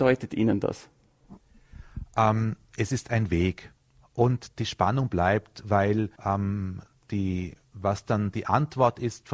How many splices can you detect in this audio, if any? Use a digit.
1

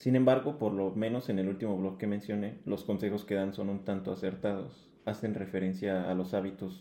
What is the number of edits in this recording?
0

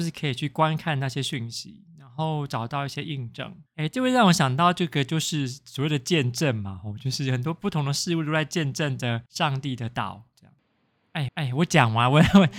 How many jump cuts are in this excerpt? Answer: 3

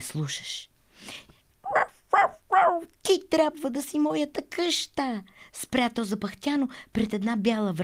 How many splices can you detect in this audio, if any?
0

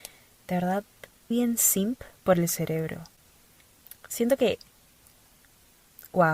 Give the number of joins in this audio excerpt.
1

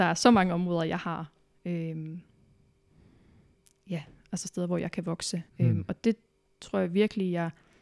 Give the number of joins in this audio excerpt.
1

